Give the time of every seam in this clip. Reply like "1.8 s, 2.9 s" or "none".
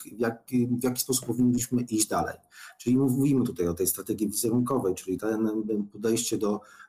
5.2 s

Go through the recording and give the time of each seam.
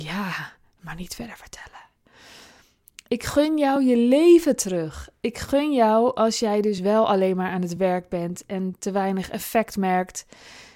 none

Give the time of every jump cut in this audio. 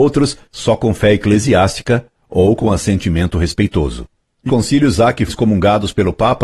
4.5 s, 5.3 s

